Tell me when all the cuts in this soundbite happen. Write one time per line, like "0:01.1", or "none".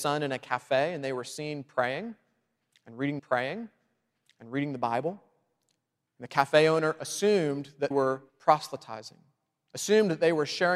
0:03.2
0:07.9
0:08.3